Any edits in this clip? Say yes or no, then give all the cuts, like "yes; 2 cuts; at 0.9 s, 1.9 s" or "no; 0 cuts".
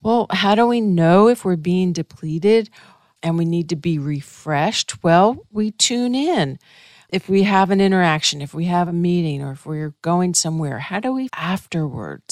yes; 1 cut; at 11.3 s